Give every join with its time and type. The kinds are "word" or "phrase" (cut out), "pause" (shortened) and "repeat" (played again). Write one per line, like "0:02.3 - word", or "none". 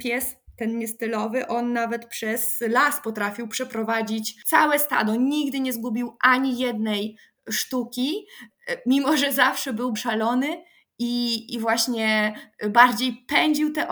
0:09.9 - word